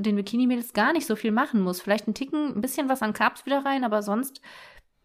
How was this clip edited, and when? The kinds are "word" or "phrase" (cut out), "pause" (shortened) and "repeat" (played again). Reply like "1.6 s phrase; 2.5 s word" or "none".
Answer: none